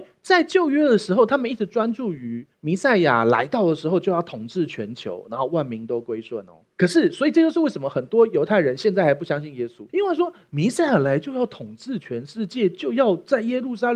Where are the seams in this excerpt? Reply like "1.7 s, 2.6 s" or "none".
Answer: 2.5 s, 6.7 s, 9.9 s